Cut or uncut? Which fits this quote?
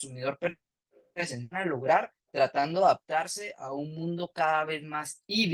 cut